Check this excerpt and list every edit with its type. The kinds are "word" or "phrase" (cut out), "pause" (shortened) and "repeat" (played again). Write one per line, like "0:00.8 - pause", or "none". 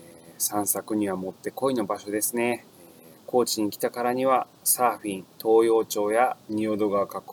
0:02.7 - pause
0:06.4 - pause